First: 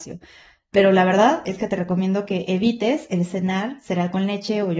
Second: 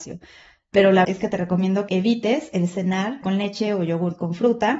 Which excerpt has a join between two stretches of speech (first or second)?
second